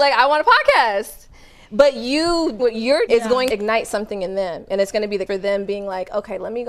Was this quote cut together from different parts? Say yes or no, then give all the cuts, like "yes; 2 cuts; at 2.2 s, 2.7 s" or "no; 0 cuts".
yes; 4 cuts; at 2.6 s, 3.1 s, 3.5 s, 5.3 s